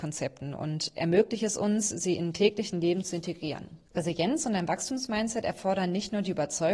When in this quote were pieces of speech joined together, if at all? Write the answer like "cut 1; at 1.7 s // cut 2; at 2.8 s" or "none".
cut 1; at 3.9 s